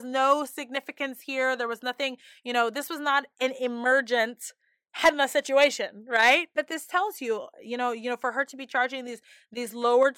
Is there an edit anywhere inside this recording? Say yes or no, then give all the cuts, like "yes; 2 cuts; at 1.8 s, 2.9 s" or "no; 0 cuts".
no; 0 cuts